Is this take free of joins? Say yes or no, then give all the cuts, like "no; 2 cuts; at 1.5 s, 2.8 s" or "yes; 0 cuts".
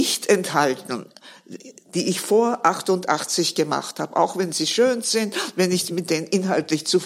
yes; 0 cuts